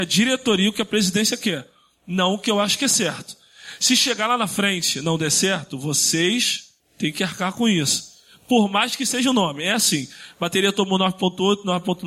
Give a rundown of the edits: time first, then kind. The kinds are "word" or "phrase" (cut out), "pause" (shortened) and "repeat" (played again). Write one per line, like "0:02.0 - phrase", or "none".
0:06.8 - pause

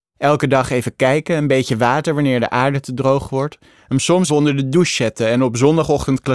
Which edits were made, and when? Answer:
0:04.3 - word

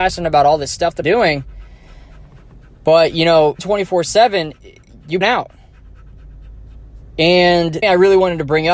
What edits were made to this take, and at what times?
0:01.0 - word
0:03.6 - word
0:05.2 - word
0:07.8 - word

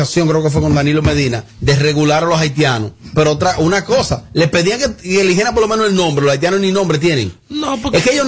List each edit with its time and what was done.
0:01.5 - pause

